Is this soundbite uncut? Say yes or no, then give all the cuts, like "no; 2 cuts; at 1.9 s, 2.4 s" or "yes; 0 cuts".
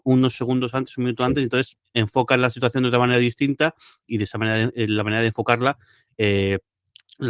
yes; 0 cuts